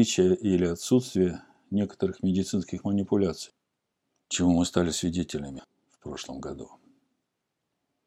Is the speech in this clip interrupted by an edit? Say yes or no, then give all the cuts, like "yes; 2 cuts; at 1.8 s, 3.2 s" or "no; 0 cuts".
no; 0 cuts